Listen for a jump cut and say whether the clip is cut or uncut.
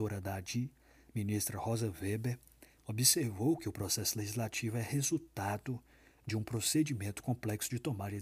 uncut